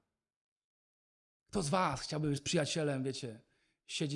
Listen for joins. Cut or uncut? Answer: cut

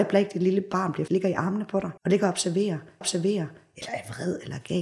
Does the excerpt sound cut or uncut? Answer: cut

